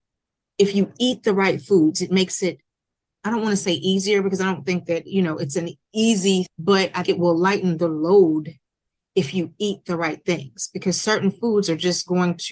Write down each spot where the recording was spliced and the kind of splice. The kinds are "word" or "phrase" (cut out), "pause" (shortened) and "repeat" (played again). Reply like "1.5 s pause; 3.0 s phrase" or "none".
6.5 s word; 7.0 s word